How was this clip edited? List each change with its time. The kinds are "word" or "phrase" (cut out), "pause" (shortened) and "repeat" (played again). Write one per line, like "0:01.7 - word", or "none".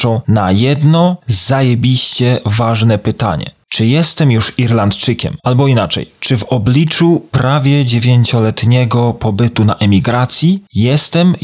0:05.4 - pause